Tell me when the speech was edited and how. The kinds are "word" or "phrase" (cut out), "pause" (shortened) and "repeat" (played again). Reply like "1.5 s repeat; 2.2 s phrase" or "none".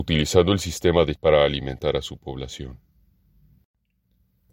1.2 s word